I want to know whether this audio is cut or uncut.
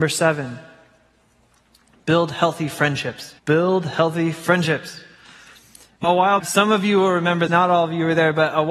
cut